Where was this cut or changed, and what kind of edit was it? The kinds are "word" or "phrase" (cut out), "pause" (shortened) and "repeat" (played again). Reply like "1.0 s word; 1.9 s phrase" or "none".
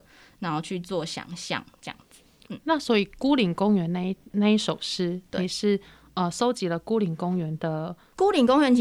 none